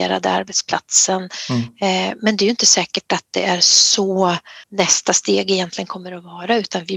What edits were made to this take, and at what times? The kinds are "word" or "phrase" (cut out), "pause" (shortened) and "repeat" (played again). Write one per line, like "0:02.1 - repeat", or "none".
0:04.6 - pause